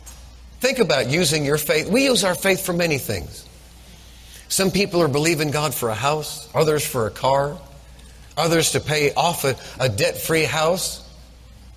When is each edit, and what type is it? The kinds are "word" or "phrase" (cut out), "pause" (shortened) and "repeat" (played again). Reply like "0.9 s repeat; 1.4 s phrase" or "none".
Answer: 8.3 s pause